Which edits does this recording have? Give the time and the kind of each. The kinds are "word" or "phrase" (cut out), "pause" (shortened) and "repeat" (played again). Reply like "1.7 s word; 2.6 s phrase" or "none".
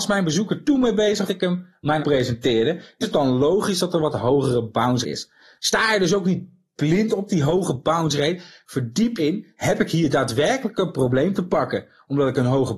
1.3 s word; 2.0 s word; 3.0 s word; 5.0 s word; 9.2 s word